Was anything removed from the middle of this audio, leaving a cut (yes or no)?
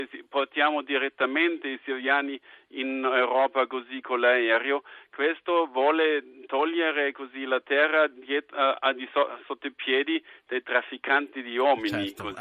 no